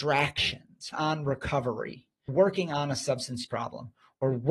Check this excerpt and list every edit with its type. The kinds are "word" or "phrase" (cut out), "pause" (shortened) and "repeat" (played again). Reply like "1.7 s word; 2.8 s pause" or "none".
0.9 s word; 2.3 s word; 3.4 s word

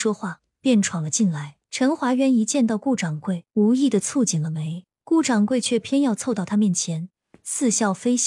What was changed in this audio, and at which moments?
1.6 s pause; 3.5 s pause; 4.9 s pause

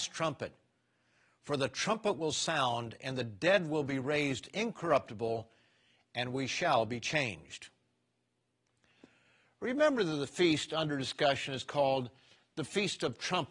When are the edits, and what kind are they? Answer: none

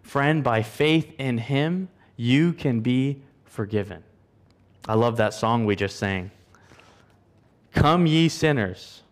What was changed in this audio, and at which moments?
4.5 s pause

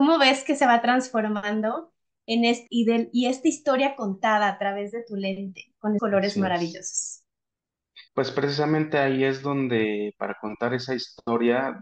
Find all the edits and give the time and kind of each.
2.7 s word; 6.0 s word; 8.1 s pause

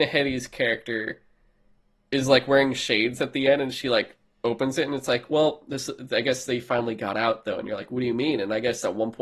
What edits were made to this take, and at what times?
none

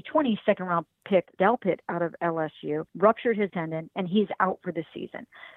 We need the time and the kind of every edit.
1.4 s word; 2.9 s pause; 3.5 s word

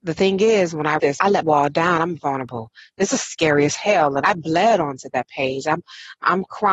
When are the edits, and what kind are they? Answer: 1.0 s word; 1.4 s word; 2.2 s word

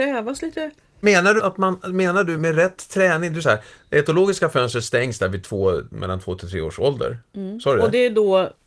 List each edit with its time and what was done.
1.0 s word; 1.4 s word; 2.4 s word; 3.4 s word

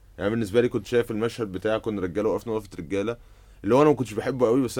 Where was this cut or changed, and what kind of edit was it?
none

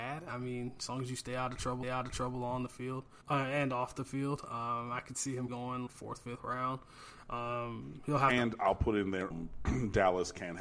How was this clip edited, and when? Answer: 1.8 s repeat; 3.2 s pause; 5.5 s word; 5.9 s word; 9.3 s phrase

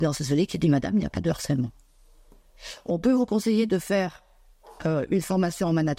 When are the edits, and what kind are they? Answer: 4.8 s pause

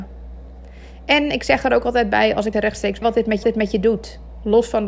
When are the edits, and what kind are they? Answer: 2.5 s word; 3.0 s phrase; 3.4 s repeat

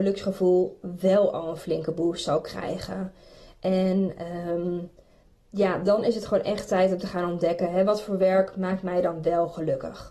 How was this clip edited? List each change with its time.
none

